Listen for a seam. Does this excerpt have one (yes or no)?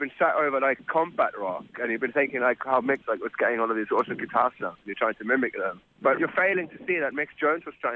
yes